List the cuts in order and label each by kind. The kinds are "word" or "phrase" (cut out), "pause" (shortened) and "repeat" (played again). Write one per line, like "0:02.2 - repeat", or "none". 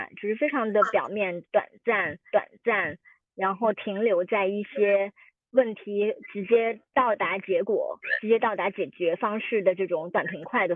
0:02.3 - repeat
0:06.9 - pause

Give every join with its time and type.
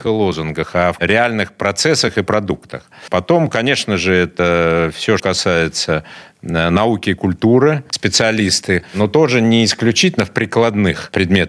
0:01.0 - word
0:05.2 - word
0:07.9 - word

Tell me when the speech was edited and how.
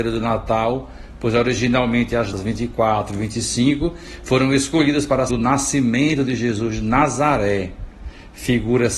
0:02.3 - word
0:05.3 - word

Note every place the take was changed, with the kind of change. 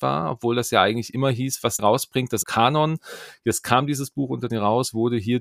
0:01.8 - word
0:02.4 - phrase
0:04.5 - word

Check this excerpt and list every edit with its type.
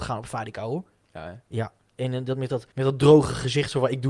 0:02.7 - pause

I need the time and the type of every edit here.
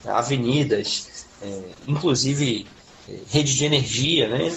0:01.8 - word

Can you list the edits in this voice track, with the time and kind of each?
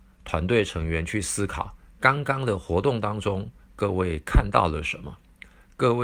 0:01.8 - pause

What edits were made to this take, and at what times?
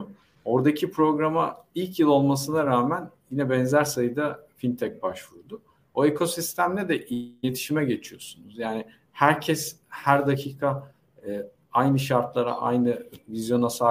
none

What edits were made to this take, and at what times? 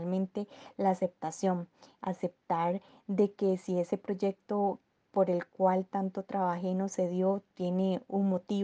none

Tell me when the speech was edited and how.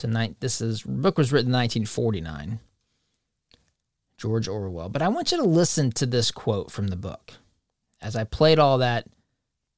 none

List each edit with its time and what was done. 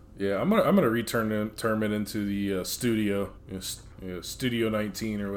0:03.4 - pause
0:03.9 - pause

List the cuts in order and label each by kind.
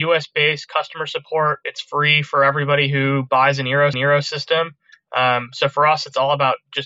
0:03.9 - repeat

